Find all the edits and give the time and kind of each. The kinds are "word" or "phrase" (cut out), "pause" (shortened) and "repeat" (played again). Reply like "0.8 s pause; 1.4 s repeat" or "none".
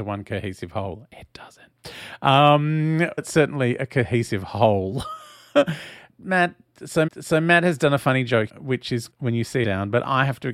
3.2 s word; 6.1 s word; 7.1 s repeat; 8.5 s word; 9.1 s word; 9.6 s phrase